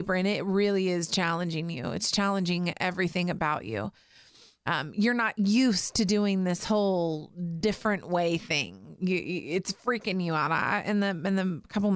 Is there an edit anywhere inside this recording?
no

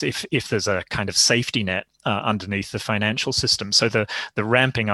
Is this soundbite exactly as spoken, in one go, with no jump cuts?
yes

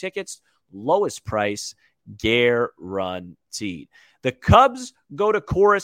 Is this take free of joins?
yes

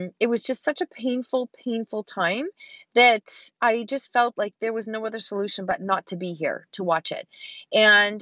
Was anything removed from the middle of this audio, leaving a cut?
no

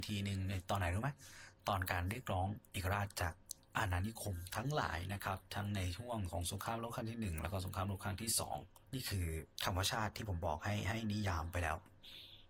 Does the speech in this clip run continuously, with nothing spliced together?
no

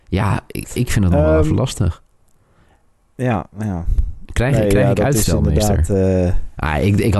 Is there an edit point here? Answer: no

